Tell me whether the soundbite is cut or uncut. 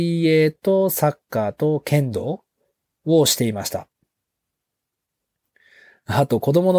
uncut